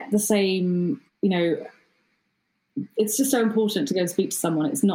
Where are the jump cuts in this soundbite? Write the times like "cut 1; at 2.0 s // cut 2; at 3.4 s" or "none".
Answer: cut 1; at 1.1 s // cut 2; at 2.9 s